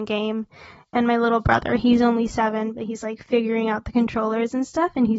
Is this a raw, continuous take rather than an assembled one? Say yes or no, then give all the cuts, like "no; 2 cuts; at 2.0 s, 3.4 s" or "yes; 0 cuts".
yes; 0 cuts